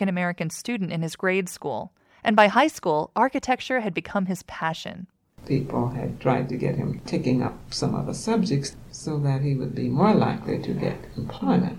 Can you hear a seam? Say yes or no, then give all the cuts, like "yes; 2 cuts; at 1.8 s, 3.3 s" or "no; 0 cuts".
no; 0 cuts